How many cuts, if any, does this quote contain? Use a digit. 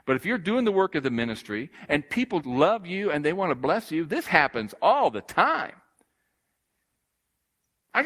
1